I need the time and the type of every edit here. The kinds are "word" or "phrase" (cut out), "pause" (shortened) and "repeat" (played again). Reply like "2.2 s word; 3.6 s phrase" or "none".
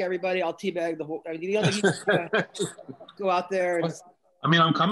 3.1 s word